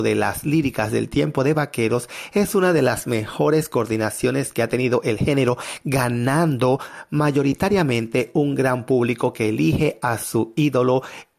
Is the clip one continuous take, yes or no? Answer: yes